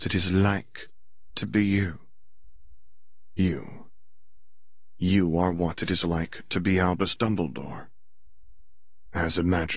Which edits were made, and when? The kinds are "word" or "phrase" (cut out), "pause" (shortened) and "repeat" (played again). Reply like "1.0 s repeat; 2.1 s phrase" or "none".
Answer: none